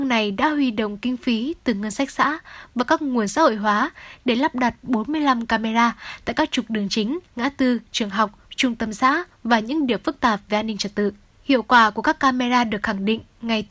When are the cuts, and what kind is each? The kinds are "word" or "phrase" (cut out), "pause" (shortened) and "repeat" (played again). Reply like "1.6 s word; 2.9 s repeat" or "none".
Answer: 7.3 s pause; 11.3 s pause